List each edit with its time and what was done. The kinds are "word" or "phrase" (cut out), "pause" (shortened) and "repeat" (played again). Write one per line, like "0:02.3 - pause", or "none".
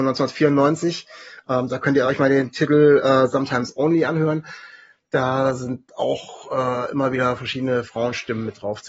none